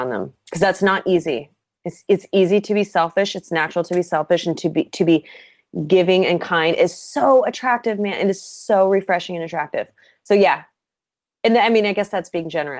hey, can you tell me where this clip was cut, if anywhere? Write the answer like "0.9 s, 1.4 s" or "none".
none